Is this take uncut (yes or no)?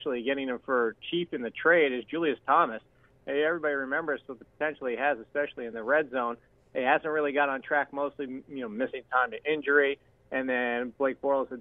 yes